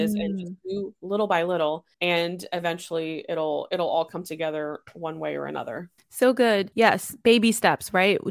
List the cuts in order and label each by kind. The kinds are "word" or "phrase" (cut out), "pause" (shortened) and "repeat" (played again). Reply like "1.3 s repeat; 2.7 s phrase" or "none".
1.9 s pause; 6.0 s pause; 6.7 s pause